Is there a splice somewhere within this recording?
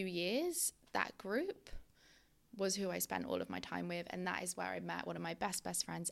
no; 0 cuts

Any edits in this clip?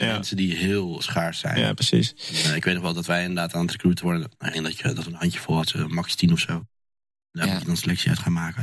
yes; 4 cuts; at 1.0 s, 4.0 s, 4.5 s, 5.6 s

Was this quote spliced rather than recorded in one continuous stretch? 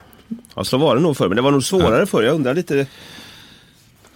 no; 0 cuts

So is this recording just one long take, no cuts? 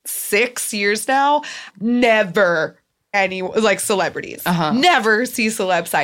no; 2 cuts; at 1.7 s, 3.1 s

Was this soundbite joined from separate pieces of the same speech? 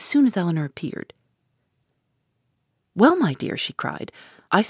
no; 0 cuts

